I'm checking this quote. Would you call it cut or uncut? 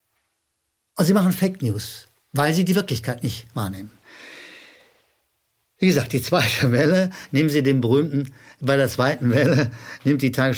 uncut